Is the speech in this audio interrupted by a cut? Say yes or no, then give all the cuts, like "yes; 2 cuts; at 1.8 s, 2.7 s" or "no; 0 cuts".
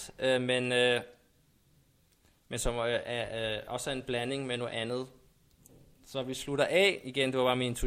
no; 0 cuts